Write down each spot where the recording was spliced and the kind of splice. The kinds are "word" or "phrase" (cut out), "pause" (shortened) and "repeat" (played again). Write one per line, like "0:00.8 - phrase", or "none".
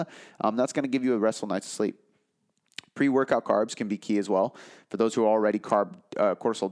none